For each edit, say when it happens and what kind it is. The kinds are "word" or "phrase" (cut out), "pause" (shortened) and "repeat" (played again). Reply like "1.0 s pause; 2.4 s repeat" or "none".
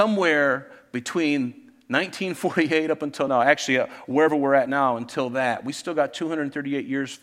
none